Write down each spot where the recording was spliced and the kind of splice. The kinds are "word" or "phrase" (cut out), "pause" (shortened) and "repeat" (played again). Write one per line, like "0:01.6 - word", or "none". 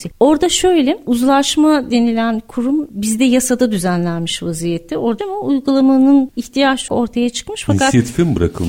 0:05.2 - phrase
0:06.9 - phrase

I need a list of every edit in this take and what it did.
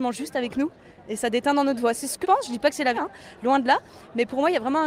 0:02.2 - word
0:02.9 - word

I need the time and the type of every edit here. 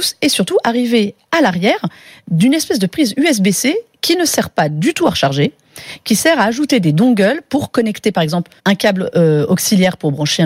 0:08.6 - pause

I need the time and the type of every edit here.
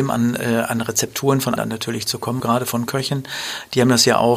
0:01.6 - word
0:02.4 - word
0:02.9 - word

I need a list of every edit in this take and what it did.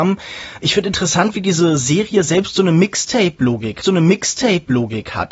0:03.8 - repeat

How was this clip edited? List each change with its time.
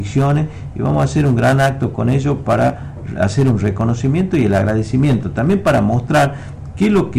none

